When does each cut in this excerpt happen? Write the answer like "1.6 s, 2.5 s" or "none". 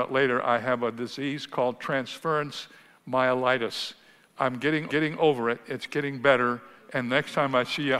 4.9 s